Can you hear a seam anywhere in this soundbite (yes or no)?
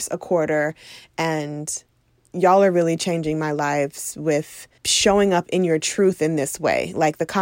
yes